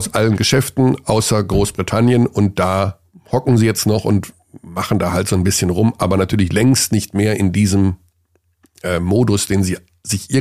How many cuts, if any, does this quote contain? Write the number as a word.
zero